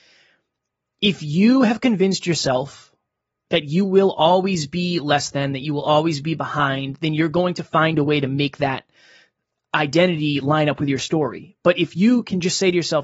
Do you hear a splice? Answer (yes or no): no